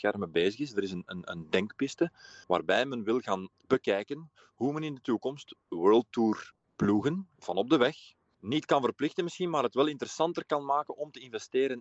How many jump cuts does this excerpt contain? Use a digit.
1